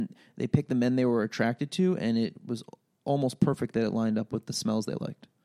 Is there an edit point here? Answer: no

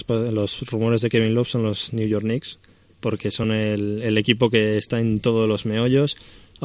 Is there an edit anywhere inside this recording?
no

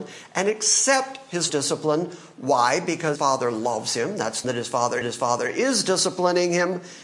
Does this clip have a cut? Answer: yes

